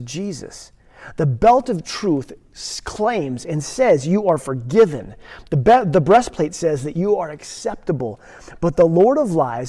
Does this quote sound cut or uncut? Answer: uncut